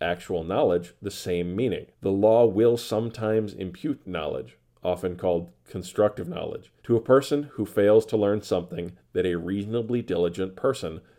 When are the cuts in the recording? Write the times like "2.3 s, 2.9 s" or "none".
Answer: 1.9 s, 6.8 s

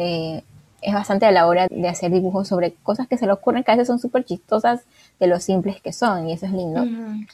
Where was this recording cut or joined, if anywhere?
1.2 s, 1.7 s

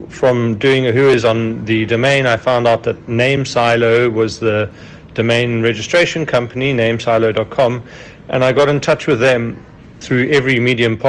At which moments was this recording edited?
none

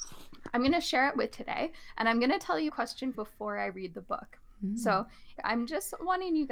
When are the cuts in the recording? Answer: 1.3 s, 2.7 s, 3.1 s, 5.4 s

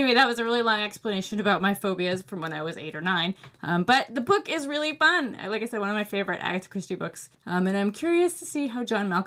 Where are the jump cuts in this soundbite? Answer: 7.3 s

